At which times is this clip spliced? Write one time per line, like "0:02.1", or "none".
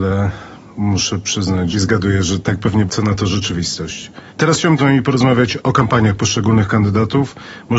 0:01.7
0:02.9
0:04.3
0:04.8